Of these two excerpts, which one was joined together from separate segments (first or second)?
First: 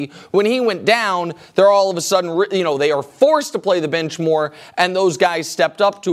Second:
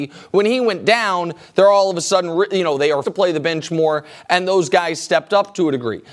second